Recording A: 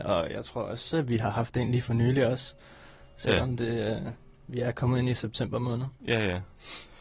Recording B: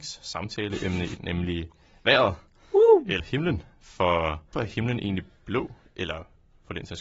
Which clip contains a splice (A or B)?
B